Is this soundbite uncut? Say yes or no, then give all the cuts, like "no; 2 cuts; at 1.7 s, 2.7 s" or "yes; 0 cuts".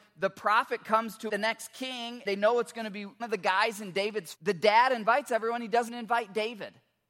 no; 5 cuts; at 1.3 s, 2.3 s, 3.2 s, 4.3 s, 5.9 s